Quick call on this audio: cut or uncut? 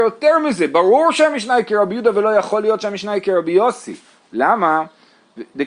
uncut